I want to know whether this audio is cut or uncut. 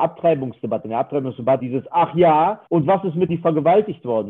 cut